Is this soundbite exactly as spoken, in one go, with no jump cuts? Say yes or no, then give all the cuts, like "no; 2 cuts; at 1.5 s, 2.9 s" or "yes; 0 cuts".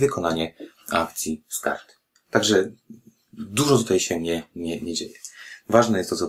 yes; 0 cuts